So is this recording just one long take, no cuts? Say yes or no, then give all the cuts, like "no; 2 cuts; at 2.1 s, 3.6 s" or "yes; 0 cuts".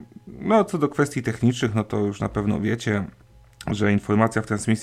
yes; 0 cuts